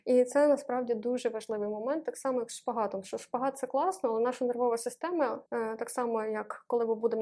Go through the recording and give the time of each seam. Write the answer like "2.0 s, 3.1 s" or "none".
5.5 s

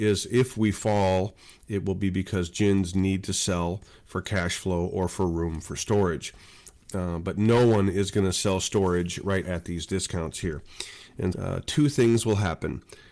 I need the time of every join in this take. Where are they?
9.4 s, 11.3 s

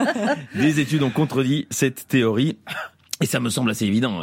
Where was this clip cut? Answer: none

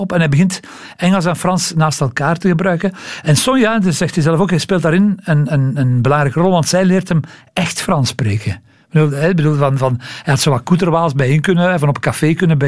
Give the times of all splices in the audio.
none

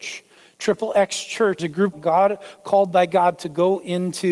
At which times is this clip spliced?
1.6 s, 1.9 s

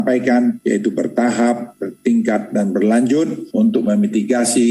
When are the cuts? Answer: none

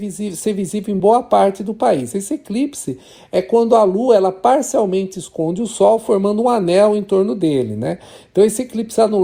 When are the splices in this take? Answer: none

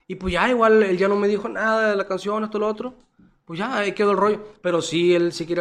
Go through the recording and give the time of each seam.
none

